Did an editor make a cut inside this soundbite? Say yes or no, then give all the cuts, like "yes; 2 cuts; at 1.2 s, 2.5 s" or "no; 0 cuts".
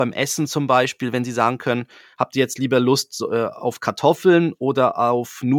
no; 0 cuts